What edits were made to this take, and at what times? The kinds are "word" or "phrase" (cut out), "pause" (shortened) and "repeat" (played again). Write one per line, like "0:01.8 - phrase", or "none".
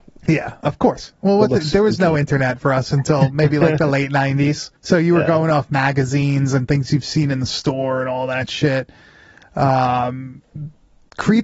0:04.8 - pause